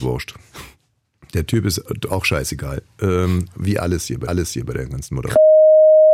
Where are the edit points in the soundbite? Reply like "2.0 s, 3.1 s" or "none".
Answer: 4.3 s